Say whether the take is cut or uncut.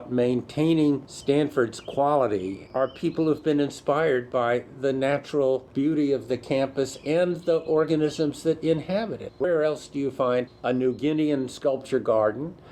uncut